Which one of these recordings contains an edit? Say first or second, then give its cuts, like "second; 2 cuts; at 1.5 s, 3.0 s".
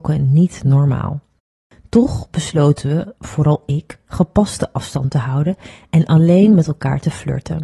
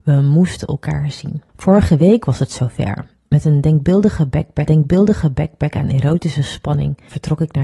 second; 2 cuts; at 1.5 s, 4.7 s